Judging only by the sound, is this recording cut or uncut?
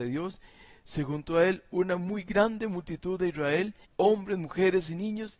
cut